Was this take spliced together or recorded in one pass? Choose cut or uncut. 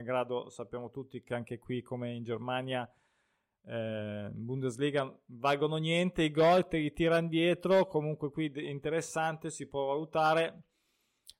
uncut